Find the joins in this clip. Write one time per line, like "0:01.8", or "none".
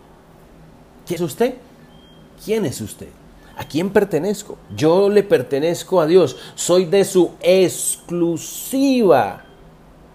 0:01.2
0:04.6